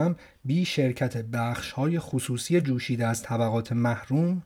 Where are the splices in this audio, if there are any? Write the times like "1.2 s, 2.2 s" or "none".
none